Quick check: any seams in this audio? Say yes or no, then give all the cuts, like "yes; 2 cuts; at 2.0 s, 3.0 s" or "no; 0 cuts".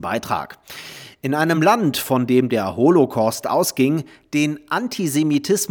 no; 0 cuts